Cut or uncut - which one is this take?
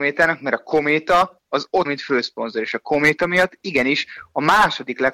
cut